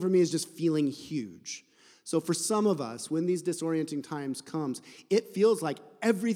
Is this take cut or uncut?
uncut